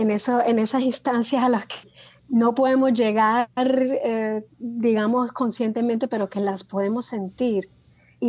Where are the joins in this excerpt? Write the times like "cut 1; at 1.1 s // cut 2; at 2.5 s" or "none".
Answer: none